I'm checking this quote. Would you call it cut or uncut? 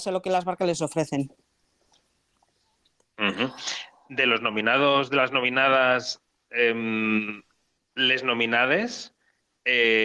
uncut